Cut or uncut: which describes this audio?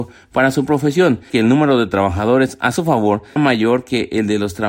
cut